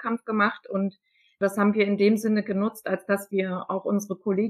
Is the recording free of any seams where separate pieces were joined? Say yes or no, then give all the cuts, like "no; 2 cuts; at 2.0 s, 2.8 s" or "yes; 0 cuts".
yes; 0 cuts